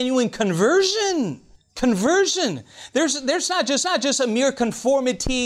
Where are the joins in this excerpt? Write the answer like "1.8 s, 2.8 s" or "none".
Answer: 1.6 s, 3.8 s